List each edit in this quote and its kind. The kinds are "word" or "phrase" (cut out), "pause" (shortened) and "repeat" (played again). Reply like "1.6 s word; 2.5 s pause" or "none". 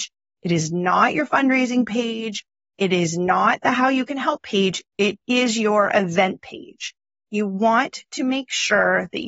none